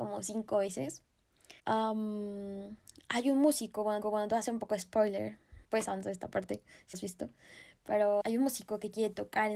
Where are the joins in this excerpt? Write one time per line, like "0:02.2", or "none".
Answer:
0:01.6
0:04.0
0:05.6
0:06.9
0:08.2